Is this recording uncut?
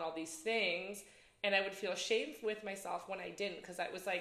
yes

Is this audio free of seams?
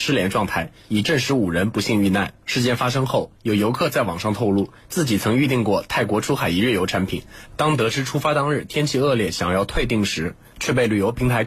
no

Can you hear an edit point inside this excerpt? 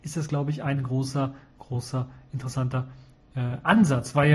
no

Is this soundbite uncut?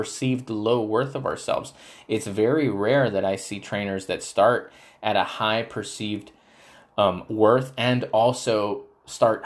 yes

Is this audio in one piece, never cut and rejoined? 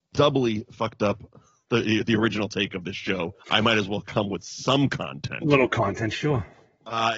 no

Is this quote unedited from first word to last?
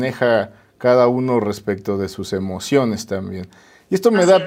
yes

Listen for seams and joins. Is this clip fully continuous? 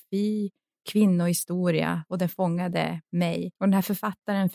no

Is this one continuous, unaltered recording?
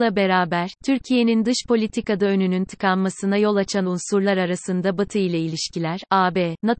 yes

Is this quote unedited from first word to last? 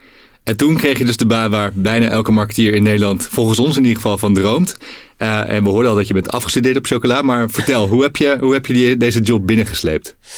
yes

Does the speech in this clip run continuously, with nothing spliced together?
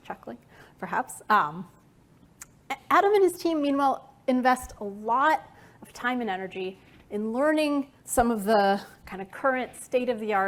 no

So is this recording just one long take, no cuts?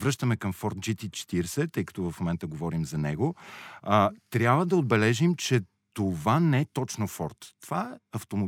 yes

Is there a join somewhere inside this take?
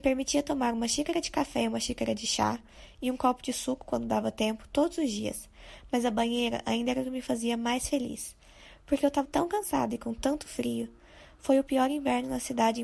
yes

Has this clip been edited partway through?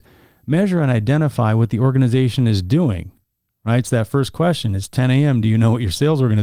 no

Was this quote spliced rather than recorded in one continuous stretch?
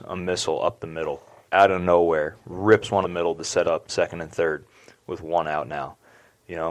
yes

